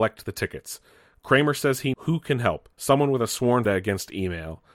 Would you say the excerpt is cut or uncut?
cut